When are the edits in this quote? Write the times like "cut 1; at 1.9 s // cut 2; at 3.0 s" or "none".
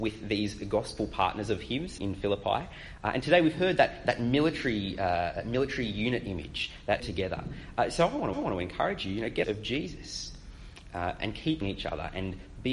cut 1; at 2.0 s // cut 2; at 7.0 s // cut 3; at 8.3 s // cut 4; at 9.4 s // cut 5; at 11.6 s